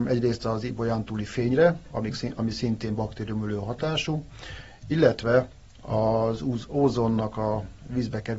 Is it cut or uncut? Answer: uncut